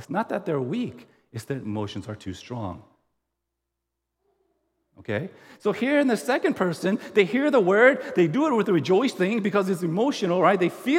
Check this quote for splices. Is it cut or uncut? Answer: uncut